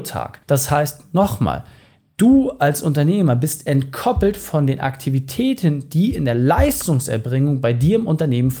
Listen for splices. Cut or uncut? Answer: uncut